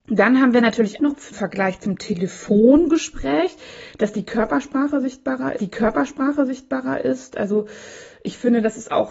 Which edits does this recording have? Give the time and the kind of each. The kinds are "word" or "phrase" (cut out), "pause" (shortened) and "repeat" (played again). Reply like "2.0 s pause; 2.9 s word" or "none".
1.0 s word; 1.3 s phrase; 5.6 s repeat